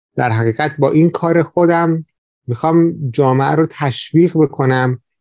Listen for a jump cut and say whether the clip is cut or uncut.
uncut